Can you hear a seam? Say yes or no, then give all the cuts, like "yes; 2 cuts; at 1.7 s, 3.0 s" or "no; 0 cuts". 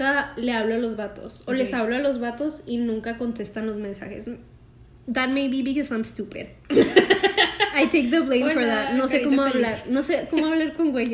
no; 0 cuts